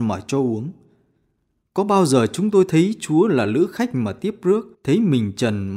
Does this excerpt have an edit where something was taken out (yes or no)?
yes